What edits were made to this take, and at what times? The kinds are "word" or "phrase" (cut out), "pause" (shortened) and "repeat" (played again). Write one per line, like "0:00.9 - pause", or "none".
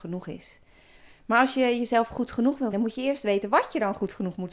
0:02.7 - word